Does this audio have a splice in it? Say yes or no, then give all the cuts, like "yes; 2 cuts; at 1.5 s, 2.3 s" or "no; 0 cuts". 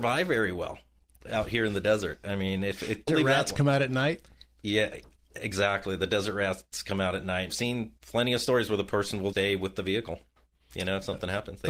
yes; 3 cuts; at 3.1 s, 7.5 s, 9.3 s